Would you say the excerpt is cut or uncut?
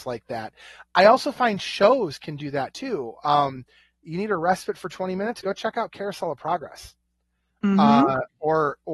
uncut